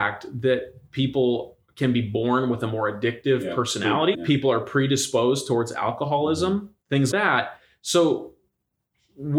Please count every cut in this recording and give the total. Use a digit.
2